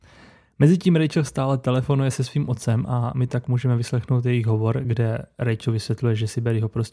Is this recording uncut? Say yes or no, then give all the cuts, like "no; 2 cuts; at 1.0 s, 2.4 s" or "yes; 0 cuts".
yes; 0 cuts